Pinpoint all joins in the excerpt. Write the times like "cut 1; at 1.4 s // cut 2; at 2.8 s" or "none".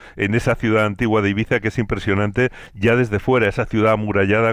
none